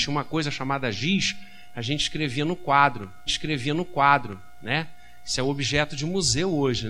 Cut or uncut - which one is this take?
cut